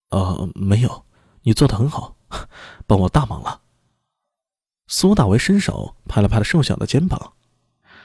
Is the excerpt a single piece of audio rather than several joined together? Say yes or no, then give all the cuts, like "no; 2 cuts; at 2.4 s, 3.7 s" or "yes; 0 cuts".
yes; 0 cuts